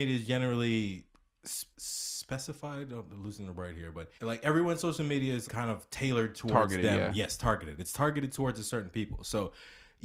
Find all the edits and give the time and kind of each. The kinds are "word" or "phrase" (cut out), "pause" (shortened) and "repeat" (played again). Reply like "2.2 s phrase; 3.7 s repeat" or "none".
1.7 s pause; 4.2 s pause; 5.5 s word